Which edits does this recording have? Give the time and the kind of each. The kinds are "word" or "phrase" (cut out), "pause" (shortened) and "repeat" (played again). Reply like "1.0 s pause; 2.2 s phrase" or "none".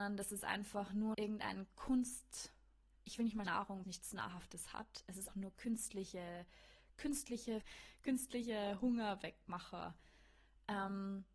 1.1 s word; 3.5 s word; 3.8 s word; 5.3 s word; 7.6 s word